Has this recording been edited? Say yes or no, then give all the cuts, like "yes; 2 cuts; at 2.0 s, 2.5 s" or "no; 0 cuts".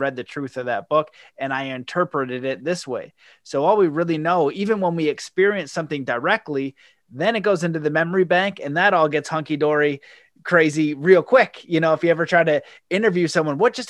no; 0 cuts